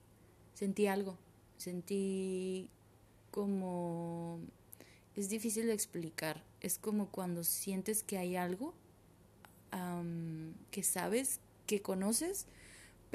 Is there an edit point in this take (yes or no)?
no